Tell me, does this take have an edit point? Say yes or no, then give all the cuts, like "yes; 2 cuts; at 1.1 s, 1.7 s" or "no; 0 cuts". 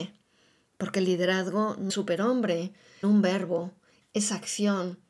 yes; 2 cuts; at 1.9 s, 3.0 s